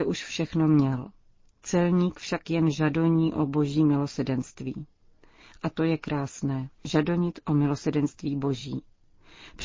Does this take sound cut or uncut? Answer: cut